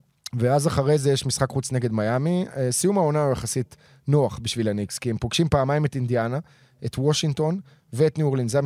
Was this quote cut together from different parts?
no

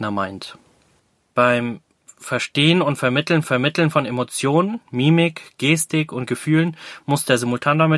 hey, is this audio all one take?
no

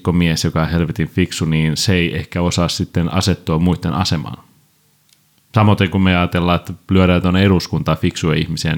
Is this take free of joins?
yes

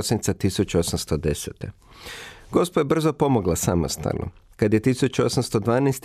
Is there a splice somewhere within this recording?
no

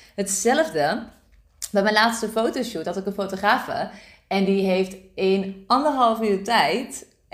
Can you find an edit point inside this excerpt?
no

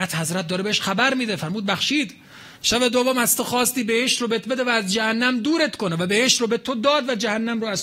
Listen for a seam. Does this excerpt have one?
yes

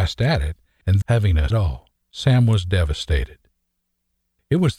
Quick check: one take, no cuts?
no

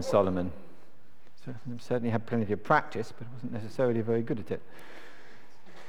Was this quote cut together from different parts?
no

